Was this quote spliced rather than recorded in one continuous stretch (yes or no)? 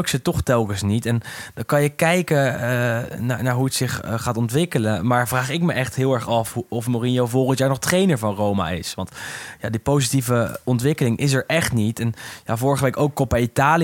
no